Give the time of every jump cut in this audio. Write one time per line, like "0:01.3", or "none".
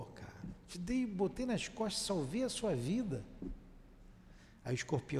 none